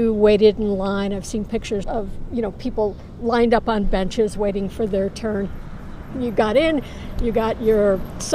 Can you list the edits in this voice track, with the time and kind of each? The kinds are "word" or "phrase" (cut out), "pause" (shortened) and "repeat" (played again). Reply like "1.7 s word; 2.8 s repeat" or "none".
1.8 s word